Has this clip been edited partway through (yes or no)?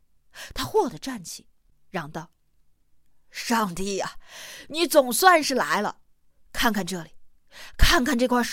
no